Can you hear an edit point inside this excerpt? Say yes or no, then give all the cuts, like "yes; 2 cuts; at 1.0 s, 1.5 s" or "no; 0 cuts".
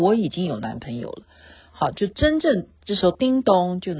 no; 0 cuts